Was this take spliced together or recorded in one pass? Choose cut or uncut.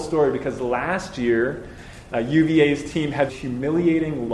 cut